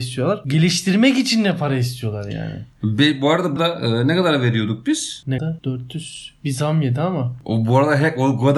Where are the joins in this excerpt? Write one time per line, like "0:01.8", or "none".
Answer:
0:03.6
0:05.4